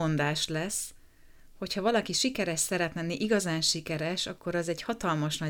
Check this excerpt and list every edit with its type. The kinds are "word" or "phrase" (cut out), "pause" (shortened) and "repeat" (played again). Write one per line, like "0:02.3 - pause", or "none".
none